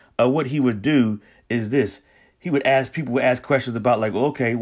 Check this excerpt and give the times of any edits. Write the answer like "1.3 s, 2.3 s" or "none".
none